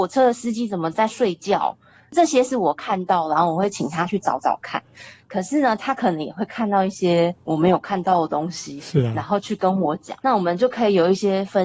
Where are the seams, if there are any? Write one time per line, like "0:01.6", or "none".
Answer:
0:07.4
0:10.2